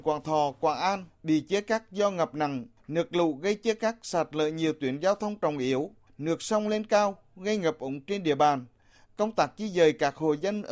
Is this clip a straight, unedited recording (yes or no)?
yes